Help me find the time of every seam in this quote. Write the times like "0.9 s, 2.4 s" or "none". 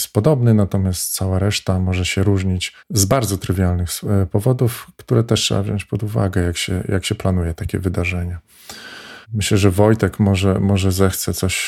2.8 s, 7.6 s, 9.2 s